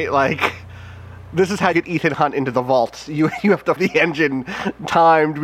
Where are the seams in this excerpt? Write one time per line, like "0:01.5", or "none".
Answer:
0:01.7
0:03.8